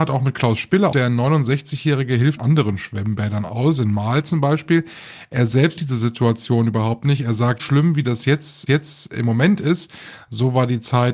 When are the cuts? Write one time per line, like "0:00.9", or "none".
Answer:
0:00.9
0:02.4
0:05.8
0:07.6
0:08.7